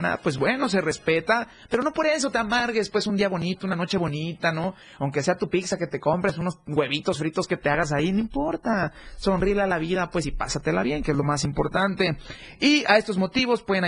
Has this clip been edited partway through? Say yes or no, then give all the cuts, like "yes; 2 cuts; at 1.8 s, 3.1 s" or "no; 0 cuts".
no; 0 cuts